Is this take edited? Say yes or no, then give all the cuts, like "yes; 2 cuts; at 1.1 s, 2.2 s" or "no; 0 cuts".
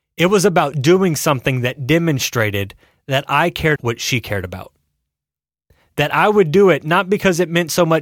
yes; 1 cut; at 3.8 s